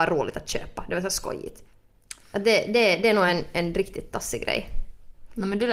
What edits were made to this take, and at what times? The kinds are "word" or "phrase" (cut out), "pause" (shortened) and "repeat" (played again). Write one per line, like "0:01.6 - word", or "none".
none